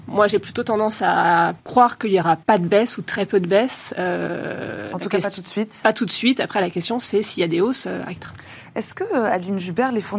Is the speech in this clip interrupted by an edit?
yes; 3 cuts; at 1.6 s, 2.4 s, 8.2 s

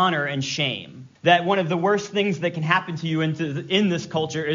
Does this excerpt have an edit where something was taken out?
yes; 1 cut; at 1.2 s

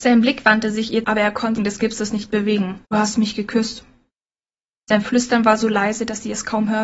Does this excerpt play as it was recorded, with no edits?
no; 3 cuts; at 1.0 s, 1.6 s, 2.9 s

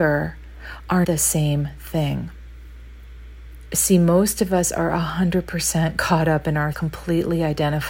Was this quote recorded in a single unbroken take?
no; 2 cuts; at 1.0 s, 6.7 s

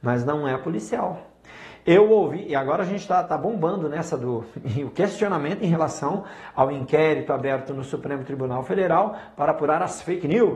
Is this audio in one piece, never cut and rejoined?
yes; 0 cuts

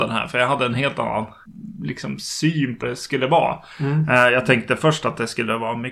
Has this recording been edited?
yes; 1 cut; at 2.8 s

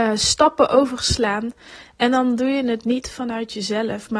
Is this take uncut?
yes; 0 cuts

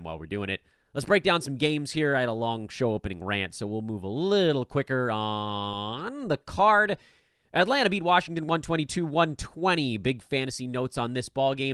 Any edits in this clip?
no; 0 cuts

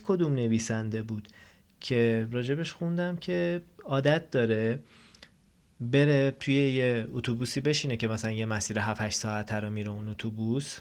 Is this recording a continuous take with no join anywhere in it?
yes; 0 cuts

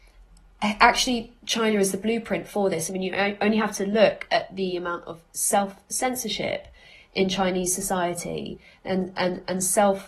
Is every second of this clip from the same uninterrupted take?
yes; 0 cuts

